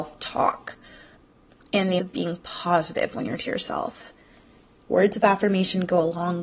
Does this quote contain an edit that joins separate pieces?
yes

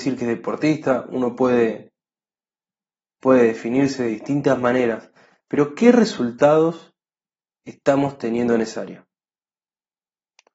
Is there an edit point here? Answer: no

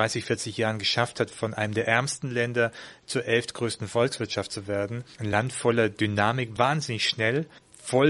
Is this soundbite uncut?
yes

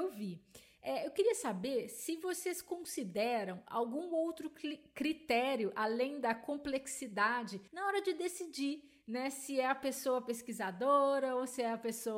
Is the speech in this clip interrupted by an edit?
yes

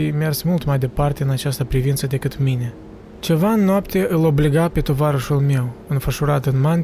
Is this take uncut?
yes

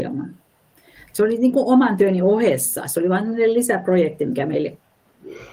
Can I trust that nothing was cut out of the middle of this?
yes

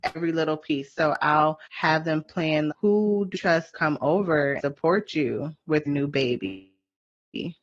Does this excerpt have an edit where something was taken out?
yes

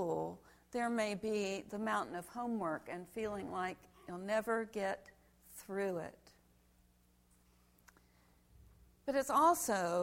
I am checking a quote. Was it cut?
no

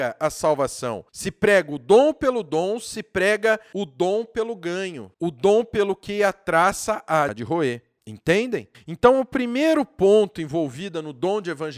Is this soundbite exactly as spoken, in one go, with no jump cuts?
no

